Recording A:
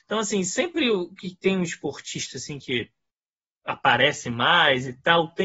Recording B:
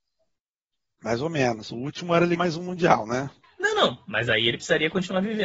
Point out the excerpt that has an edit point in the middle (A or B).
B